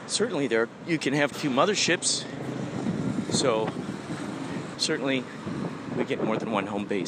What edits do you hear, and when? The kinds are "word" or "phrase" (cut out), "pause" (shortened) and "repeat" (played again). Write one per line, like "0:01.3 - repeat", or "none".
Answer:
0:01.3 - word
0:04.7 - word
0:06.2 - word